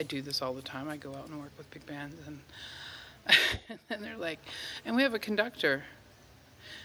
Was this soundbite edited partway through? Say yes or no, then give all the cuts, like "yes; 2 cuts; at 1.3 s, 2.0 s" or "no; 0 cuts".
no; 0 cuts